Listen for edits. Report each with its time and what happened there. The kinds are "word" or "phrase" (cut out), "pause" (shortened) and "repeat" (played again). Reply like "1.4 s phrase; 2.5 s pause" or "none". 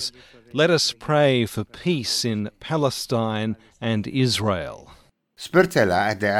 none